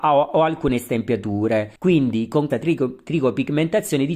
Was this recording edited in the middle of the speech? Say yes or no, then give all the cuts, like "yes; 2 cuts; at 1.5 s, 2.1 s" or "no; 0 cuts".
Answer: yes; 2 cuts; at 1.8 s, 2.5 s